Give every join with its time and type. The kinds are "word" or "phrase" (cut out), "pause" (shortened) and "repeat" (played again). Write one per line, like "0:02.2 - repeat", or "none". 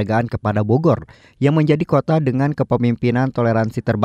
none